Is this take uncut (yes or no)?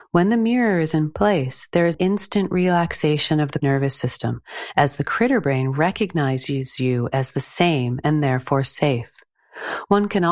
no